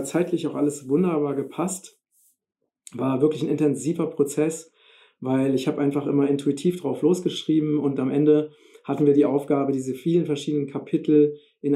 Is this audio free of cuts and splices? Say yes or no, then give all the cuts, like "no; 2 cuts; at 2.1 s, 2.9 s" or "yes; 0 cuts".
yes; 0 cuts